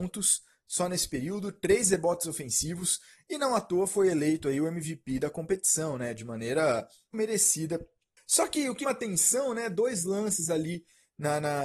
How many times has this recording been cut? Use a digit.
2